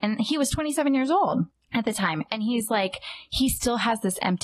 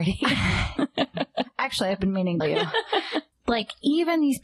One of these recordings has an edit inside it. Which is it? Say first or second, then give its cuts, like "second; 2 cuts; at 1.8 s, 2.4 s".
second; 1 cut; at 2.4 s